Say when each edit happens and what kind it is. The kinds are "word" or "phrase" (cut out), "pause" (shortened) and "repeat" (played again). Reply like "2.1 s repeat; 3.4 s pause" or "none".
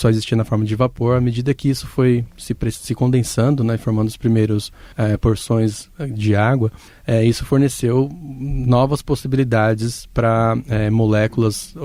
4.9 s pause